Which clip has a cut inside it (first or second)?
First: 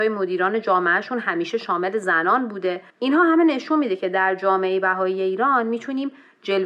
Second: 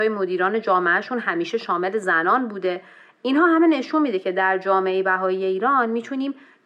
first